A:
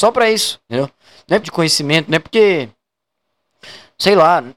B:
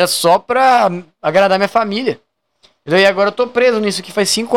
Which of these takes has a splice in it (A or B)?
A